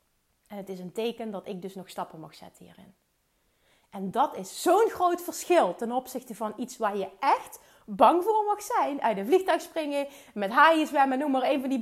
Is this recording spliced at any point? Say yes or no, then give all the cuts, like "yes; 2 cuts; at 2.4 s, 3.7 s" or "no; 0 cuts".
no; 0 cuts